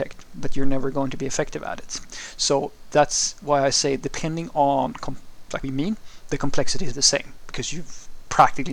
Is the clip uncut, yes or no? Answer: no